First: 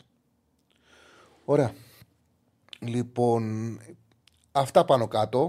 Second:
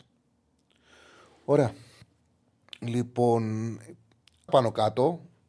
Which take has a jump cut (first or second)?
second